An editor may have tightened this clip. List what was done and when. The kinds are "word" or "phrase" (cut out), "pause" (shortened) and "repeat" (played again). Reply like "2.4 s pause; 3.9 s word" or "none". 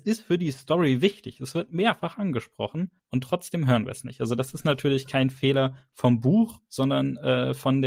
3.0 s pause